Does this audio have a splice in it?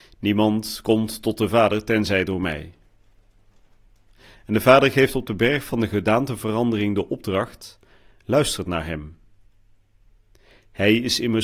no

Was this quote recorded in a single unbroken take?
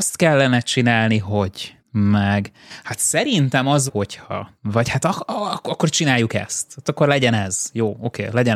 no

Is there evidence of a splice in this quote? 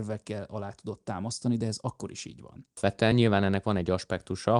no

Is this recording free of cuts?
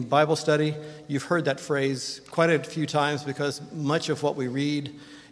yes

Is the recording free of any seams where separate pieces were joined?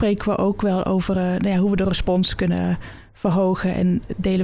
yes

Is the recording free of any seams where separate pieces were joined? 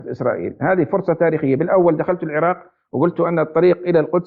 yes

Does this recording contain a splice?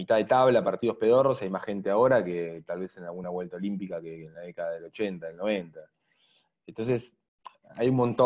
no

